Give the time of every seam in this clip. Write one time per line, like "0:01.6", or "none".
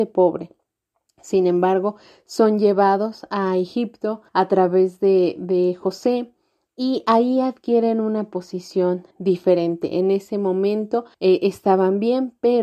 0:04.3
0:09.1
0:11.1